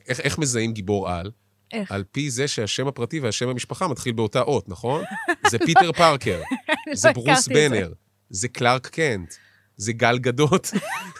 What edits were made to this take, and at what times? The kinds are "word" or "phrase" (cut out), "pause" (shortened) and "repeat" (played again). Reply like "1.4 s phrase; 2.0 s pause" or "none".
none